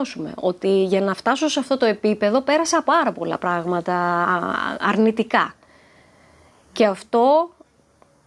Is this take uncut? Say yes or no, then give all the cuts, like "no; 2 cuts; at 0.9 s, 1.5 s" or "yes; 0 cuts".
yes; 0 cuts